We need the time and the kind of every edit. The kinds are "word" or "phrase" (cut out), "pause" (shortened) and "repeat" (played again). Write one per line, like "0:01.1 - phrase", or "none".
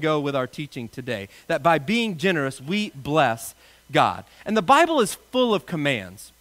none